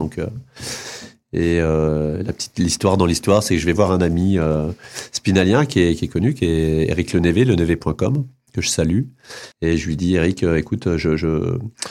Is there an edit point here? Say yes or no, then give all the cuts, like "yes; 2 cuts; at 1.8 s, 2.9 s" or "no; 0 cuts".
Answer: yes; 1 cut; at 9.5 s